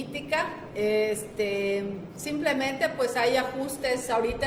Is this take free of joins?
yes; 0 cuts

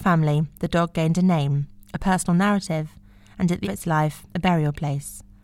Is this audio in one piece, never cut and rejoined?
no; 2 cuts; at 3.6 s, 4.3 s

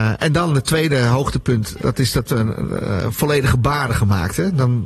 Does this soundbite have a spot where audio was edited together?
yes; 2 cuts; at 1.8 s, 3.9 s

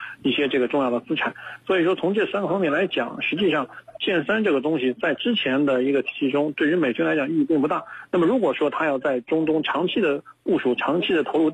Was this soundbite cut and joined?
yes; 1 cut; at 4.0 s

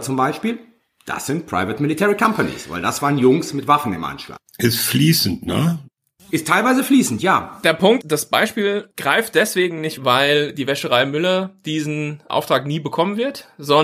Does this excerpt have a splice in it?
yes; 2 cuts; at 8.0 s, 10.0 s

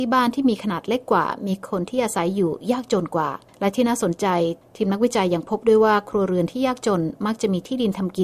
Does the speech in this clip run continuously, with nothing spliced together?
yes; 0 cuts

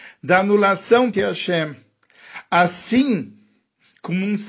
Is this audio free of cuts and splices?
no; 1 cut; at 1.1 s

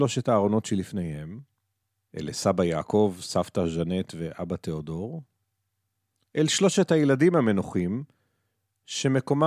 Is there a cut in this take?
no; 0 cuts

